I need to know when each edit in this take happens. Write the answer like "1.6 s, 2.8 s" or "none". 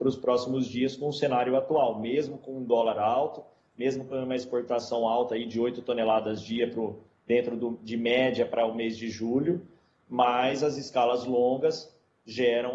none